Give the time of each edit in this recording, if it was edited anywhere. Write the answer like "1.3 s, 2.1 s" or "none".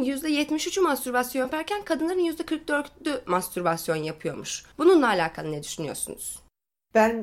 none